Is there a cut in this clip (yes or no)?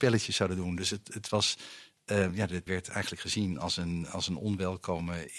yes